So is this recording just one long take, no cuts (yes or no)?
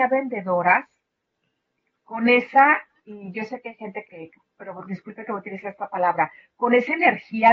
no